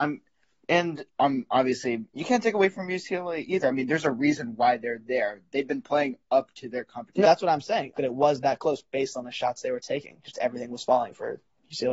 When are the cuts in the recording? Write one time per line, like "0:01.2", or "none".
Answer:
0:01.1
0:02.1
0:07.2
0:08.0

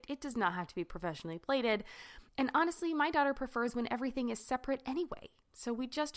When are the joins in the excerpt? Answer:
0:02.3

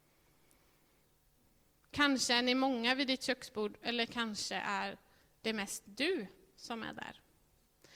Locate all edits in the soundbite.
none

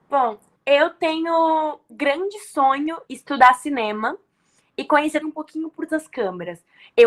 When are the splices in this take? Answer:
0:01.9
0:03.1
0:05.2
0:05.9

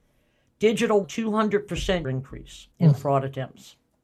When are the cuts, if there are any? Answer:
0:01.0
0:02.0
0:02.7

